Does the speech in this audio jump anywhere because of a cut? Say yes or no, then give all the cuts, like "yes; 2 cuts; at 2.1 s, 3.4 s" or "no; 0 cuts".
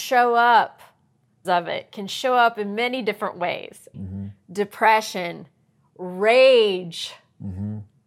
yes; 2 cuts; at 1.4 s, 3.9 s